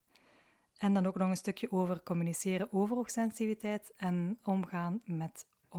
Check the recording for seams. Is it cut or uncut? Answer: uncut